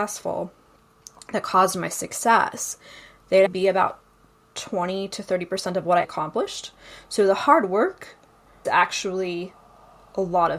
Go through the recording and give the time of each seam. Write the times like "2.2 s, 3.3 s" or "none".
3.5 s, 6.0 s, 8.6 s